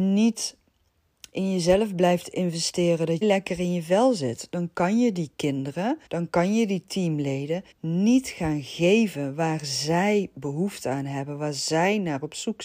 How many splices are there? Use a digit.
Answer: 3